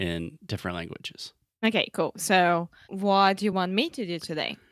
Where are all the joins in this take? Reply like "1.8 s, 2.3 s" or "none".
none